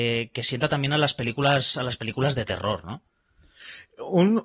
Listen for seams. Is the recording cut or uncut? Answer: uncut